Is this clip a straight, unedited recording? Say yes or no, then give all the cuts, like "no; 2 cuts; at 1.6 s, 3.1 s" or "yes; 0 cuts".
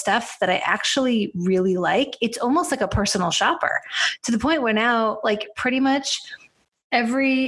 yes; 0 cuts